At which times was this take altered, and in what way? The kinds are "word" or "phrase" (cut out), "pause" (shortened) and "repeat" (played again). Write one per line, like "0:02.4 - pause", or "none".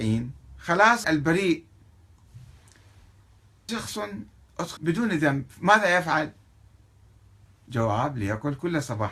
0:01.0 - word
0:03.7 - word
0:04.8 - word